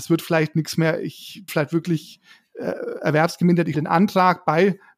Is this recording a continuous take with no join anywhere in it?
no; 2 cuts; at 1.5 s, 3.7 s

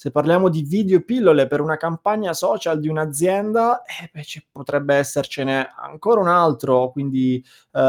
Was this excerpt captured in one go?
yes; 0 cuts

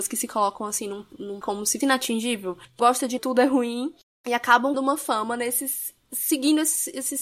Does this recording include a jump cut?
yes; 5 cuts; at 1.4 s, 1.8 s, 2.8 s, 3.2 s, 4.7 s

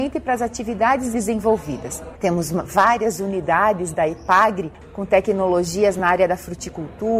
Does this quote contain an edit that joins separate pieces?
no; 0 cuts

